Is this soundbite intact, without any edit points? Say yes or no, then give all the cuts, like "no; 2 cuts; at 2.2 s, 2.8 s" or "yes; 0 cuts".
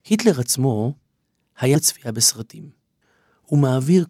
no; 1 cut; at 1.7 s